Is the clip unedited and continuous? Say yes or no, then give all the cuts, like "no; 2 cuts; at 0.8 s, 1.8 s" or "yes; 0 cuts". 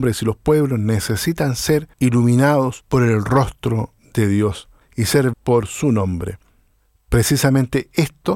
no; 2 cuts; at 1.9 s, 5.3 s